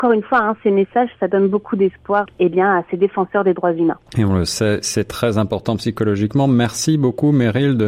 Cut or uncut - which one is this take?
cut